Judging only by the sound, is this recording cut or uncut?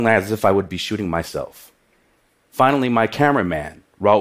uncut